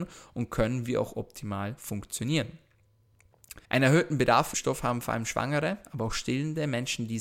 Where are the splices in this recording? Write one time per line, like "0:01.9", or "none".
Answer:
0:03.6
0:04.5